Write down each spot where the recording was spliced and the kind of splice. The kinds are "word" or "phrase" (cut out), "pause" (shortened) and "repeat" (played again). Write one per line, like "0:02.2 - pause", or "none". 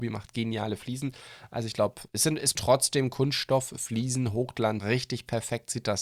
0:02.1 - word
0:02.5 - word
0:04.8 - word